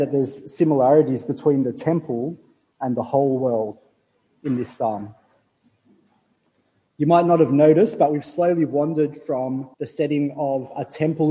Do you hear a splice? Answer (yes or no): yes